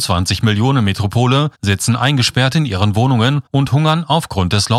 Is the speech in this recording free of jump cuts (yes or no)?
no